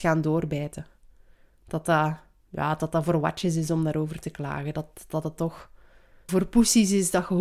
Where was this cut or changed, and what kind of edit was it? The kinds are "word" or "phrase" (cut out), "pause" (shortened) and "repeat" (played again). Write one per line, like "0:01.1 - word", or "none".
0:06.3 - word